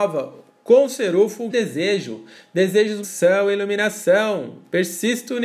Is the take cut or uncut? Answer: cut